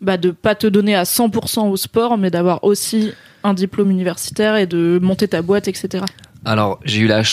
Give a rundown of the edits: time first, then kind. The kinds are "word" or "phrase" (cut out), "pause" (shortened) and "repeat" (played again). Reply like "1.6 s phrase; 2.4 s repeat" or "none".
none